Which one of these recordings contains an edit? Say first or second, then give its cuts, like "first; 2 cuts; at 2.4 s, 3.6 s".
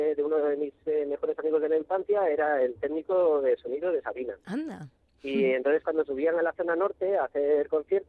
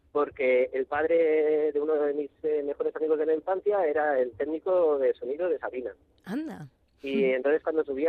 first; 1 cut; at 4.4 s